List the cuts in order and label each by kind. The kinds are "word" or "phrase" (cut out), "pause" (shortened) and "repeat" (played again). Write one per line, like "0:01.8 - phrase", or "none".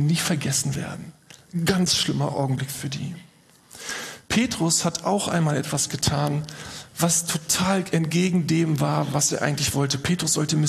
none